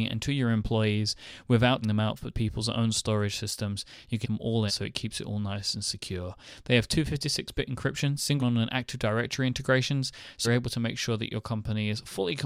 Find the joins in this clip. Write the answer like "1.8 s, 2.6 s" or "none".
1.8 s, 2.3 s, 4.2 s, 4.7 s, 8.4 s, 10.4 s